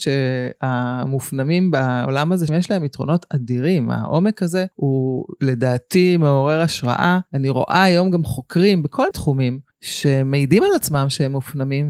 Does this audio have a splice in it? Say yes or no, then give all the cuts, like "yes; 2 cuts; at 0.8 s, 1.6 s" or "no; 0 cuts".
yes; 5 cuts; at 2.5 s, 4.7 s, 7.3 s, 9.1 s, 9.7 s